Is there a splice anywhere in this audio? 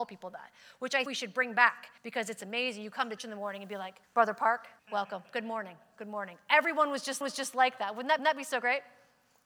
yes; 7 cuts; at 1.1 s, 2.0 s, 3.2 s, 4.0 s, 4.8 s, 7.2 s, 8.2 s

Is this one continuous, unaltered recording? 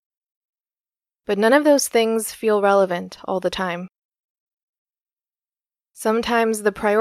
yes; 0 cuts

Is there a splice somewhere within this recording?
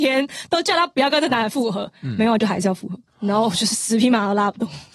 yes; 1 cut; at 3.1 s

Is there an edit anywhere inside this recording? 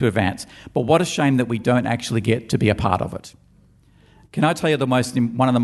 no; 0 cuts

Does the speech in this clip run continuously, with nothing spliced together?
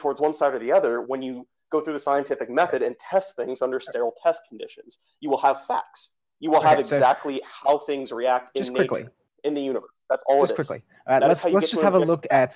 yes; 0 cuts

